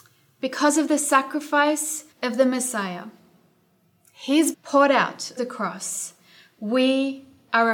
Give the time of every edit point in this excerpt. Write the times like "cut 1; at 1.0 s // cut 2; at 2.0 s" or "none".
cut 1; at 2.1 s // cut 2; at 4.5 s // cut 3; at 5.4 s